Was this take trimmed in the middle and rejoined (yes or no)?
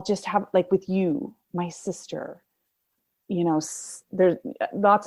no